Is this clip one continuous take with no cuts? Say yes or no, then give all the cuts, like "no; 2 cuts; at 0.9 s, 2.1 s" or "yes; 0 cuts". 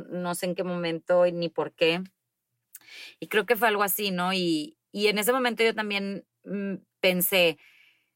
yes; 0 cuts